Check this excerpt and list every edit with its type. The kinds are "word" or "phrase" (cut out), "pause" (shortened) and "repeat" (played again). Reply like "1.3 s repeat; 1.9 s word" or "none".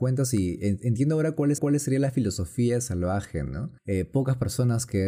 1.6 s repeat; 3.8 s pause